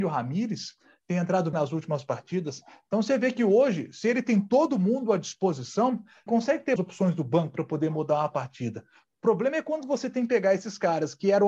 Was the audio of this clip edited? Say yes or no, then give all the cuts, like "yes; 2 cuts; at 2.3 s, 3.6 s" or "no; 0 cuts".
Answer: yes; 3 cuts; at 1.5 s, 6.3 s, 6.8 s